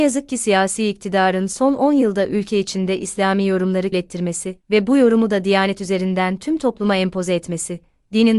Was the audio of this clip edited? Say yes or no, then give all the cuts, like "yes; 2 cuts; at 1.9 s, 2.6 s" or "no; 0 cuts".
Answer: yes; 2 cuts; at 3.9 s, 4.6 s